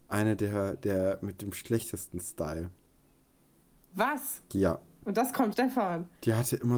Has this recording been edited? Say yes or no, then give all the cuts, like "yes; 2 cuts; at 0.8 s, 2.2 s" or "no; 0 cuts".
yes; 1 cut; at 5.5 s